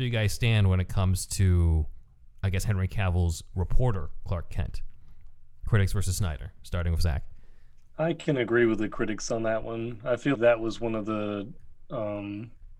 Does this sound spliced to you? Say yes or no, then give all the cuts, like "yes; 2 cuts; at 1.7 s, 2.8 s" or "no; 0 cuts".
yes; 1 cut; at 10.4 s